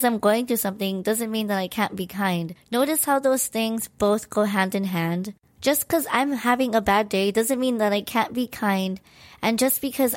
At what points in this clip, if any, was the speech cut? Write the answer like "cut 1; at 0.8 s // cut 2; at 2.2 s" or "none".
none